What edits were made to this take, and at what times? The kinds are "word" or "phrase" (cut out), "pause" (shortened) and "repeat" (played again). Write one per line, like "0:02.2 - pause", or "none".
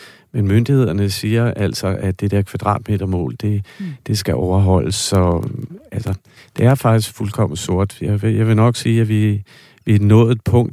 none